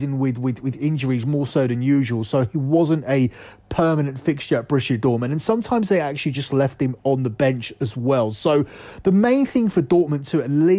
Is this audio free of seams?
yes; 0 cuts

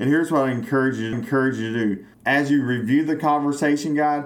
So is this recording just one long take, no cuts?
no; 2 cuts; at 1.1 s, 2.1 s

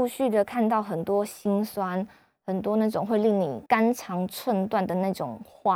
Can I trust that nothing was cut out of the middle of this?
no; 1 cut; at 3.7 s

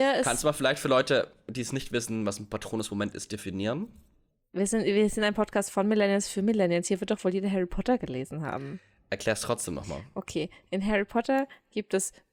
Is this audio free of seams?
yes; 0 cuts

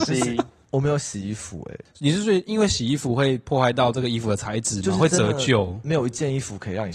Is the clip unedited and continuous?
yes; 0 cuts

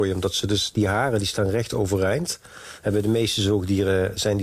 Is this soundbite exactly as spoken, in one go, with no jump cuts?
yes; 0 cuts

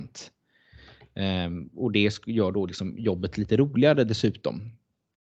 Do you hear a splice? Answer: no; 0 cuts

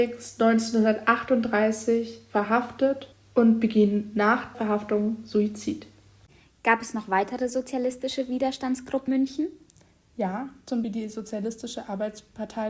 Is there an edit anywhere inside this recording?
yes; 4 cuts; at 3.1 s, 4.5 s, 9.1 s, 10.8 s

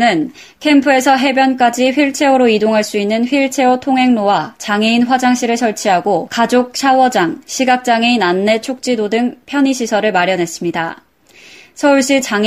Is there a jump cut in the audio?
no; 0 cuts

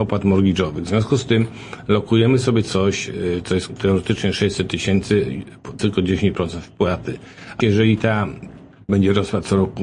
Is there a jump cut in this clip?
yes; 4 cuts; at 3.7 s, 5.8 s, 7.6 s, 8.9 s

